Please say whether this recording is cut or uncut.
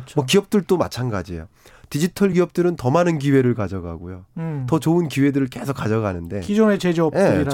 uncut